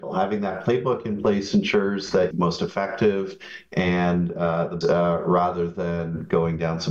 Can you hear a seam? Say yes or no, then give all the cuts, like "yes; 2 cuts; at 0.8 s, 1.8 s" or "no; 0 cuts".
yes; 2 cuts; at 2.3 s, 4.8 s